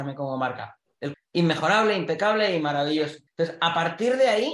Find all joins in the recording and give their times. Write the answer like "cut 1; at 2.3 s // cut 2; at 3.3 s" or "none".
cut 1; at 1.1 s // cut 2; at 3.3 s